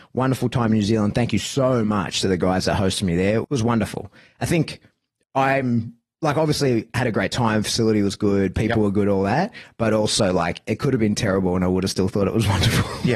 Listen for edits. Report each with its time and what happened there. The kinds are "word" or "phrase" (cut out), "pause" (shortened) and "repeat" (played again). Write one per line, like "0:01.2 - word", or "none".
none

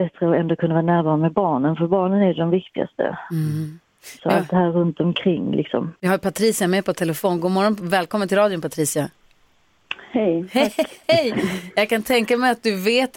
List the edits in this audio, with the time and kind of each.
0:06.0 - pause
0:11.0 - word

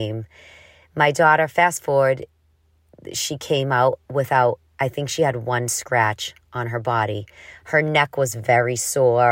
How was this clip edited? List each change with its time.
0:04.0 - pause

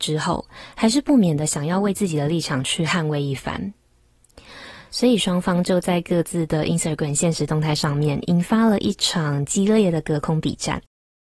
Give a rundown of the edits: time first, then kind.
none

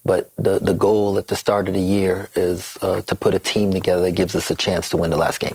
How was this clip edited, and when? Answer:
none

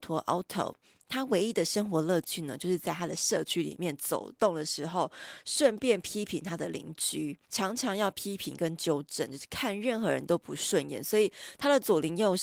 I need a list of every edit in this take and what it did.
0:07.4 - pause

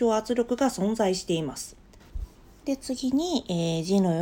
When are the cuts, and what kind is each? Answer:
none

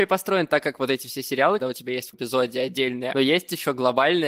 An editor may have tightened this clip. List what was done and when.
0:01.6 - word
0:02.1 - word
0:03.1 - phrase

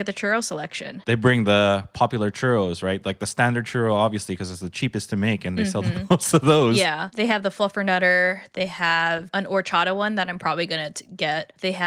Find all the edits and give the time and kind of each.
none

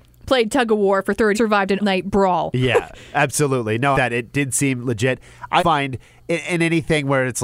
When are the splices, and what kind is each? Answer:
0:01.3 - phrase
0:01.8 - word
0:03.9 - phrase
0:05.6 - word

